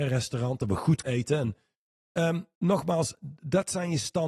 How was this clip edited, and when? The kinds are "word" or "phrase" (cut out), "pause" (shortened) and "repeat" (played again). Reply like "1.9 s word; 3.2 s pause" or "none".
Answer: 1.0 s word; 2.5 s pause